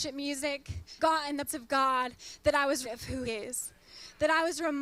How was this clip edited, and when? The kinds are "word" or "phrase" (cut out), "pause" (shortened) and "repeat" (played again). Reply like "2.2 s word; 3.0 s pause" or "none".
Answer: 1.0 s word; 1.5 s word; 2.8 s word; 3.3 s word